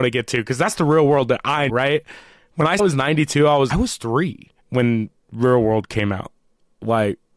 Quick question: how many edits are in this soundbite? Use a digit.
4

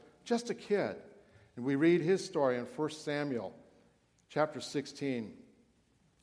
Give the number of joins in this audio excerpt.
0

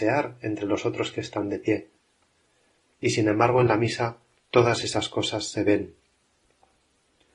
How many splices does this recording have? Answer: 0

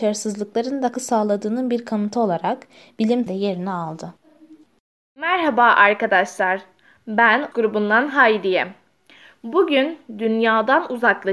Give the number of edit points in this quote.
3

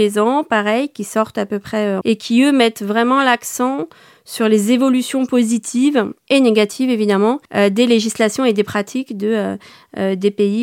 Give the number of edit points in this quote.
3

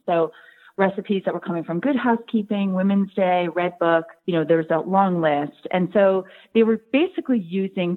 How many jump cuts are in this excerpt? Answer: 1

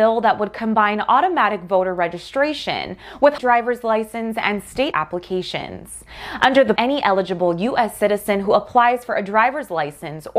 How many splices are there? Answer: 3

